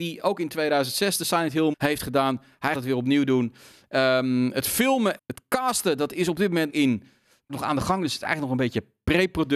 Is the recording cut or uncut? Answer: cut